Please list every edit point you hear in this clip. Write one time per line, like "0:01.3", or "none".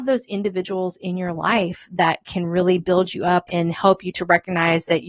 0:03.5